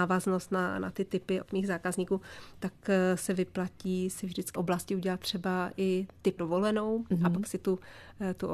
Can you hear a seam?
yes; 3 cuts; at 1.4 s, 4.5 s, 6.4 s

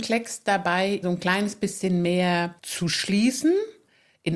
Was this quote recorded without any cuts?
no; 2 cuts; at 1.0 s, 2.6 s

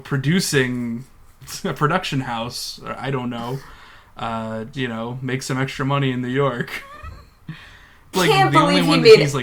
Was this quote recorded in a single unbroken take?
no; 2 cuts; at 4.7 s, 8.1 s

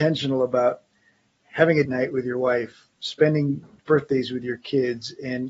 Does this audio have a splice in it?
yes; 2 cuts; at 1.9 s, 2.9 s

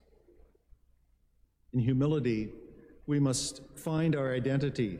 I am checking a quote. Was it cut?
no; 0 cuts

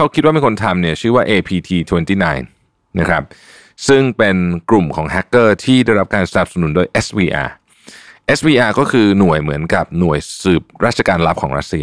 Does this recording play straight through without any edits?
yes; 0 cuts

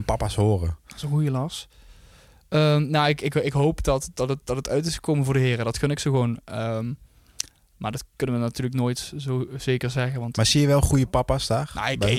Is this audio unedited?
yes; 0 cuts

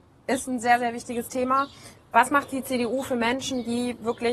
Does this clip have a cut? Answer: no; 0 cuts

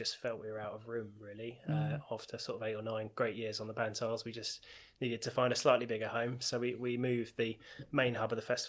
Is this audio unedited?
yes; 0 cuts

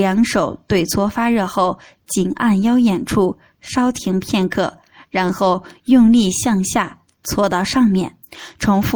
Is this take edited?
no; 0 cuts

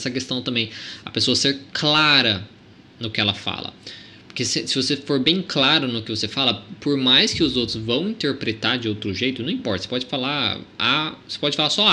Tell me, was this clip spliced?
no; 0 cuts

